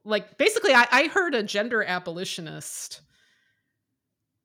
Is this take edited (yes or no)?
no